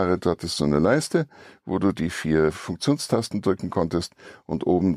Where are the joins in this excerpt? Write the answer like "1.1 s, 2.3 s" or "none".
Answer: none